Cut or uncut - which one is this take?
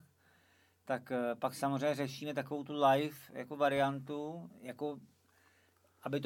uncut